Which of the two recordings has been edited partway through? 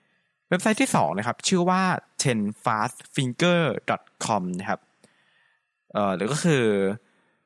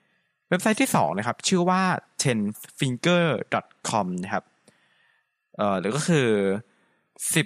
second; 1 cut; at 2.5 s

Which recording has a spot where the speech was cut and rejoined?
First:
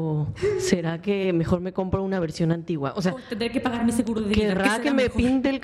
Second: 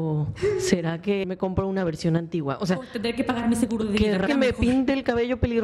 second; 2 cuts; at 1.2 s, 4.3 s

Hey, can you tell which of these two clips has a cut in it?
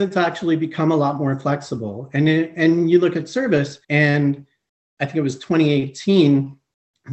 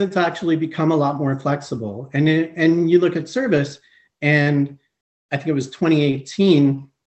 first; 1 cut; at 3.8 s

